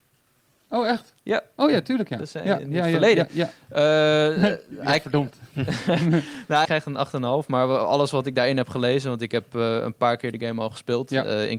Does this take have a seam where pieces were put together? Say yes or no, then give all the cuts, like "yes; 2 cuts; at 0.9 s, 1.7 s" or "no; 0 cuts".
yes; 1 cut; at 6.6 s